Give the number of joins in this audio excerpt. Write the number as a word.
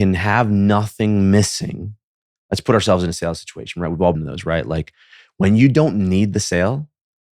one